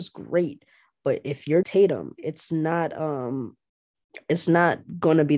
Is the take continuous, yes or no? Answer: no